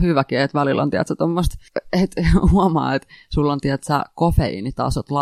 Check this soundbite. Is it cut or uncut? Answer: uncut